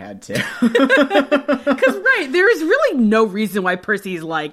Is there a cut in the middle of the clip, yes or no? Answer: no